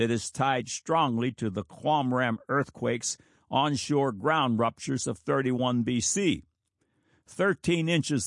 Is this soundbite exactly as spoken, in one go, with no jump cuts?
yes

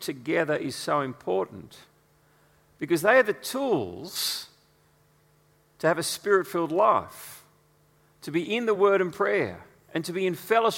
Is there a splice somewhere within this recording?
no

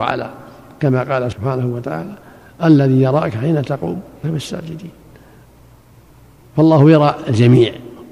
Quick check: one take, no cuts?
no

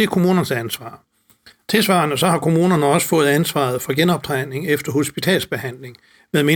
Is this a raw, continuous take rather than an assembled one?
yes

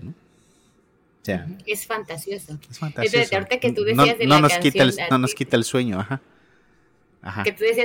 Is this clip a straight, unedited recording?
yes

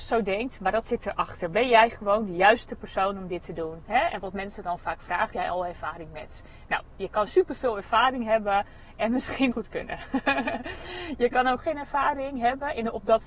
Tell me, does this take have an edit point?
yes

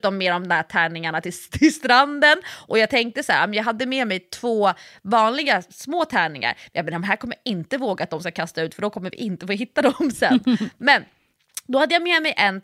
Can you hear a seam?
no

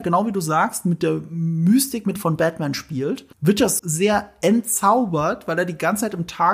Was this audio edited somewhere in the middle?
yes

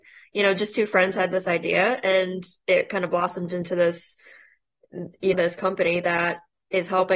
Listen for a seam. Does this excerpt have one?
yes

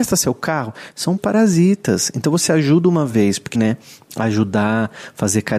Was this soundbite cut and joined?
yes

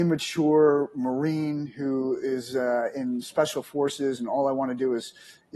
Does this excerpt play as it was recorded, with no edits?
yes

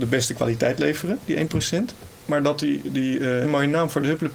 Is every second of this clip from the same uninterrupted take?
no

